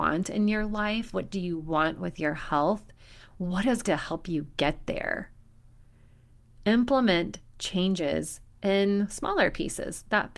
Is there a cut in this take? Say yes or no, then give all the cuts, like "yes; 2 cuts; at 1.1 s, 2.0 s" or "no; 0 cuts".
yes; 1 cut; at 3.8 s